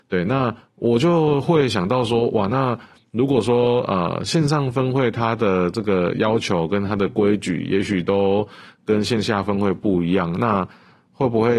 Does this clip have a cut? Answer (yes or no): no